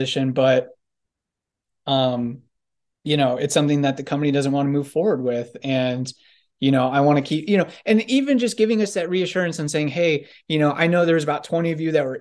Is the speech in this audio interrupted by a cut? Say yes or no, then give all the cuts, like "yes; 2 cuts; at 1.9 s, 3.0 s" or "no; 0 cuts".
no; 0 cuts